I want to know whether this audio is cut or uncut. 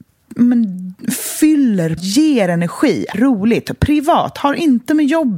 cut